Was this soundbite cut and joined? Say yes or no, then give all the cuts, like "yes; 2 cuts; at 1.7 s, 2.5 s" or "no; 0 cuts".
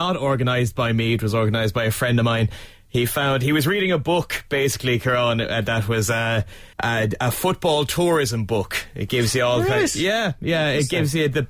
yes; 1 cut; at 6.7 s